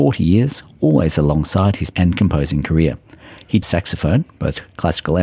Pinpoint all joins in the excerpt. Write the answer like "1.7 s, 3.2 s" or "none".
1.9 s, 3.6 s